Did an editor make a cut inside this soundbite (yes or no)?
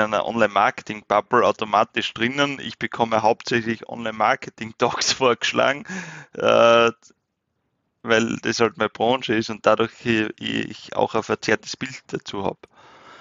no